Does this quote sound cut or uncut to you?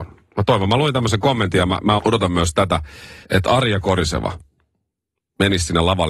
cut